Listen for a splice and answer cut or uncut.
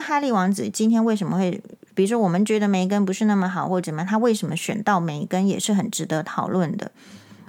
uncut